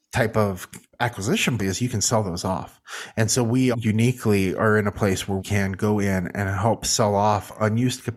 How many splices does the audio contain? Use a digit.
3